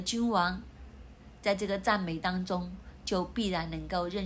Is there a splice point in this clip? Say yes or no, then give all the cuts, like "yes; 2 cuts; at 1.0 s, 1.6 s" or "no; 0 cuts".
no; 0 cuts